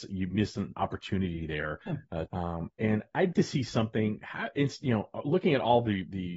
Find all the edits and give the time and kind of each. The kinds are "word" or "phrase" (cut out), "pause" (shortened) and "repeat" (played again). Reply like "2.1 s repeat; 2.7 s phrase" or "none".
1.8 s pause; 2.3 s phrase; 3.3 s word